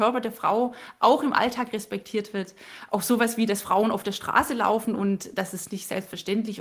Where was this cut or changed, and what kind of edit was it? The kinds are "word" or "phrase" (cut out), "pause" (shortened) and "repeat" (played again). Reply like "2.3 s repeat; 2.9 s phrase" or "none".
none